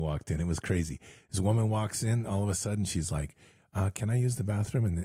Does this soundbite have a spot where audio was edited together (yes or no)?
no